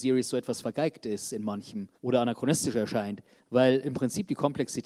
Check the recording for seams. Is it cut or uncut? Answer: cut